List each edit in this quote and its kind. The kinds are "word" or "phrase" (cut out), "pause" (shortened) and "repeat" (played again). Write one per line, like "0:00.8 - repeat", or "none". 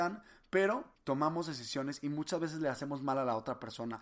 0:00.9 - pause